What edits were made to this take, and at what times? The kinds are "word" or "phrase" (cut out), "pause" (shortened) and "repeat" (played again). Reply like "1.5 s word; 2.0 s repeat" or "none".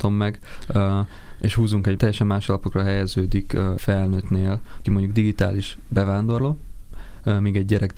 2.0 s word; 3.8 s word; 4.8 s word